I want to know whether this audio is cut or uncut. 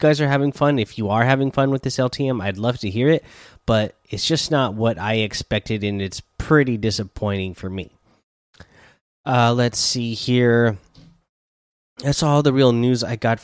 uncut